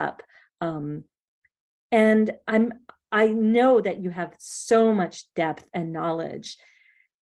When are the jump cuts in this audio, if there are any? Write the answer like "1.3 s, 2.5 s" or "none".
none